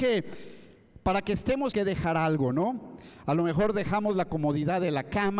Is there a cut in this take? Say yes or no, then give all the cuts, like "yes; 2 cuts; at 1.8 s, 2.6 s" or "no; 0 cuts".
yes; 1 cut; at 1.7 s